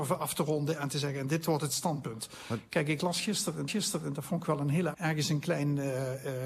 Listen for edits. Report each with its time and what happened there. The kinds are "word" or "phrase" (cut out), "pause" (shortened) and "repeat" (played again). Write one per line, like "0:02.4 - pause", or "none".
0:03.7 - repeat
0:04.9 - word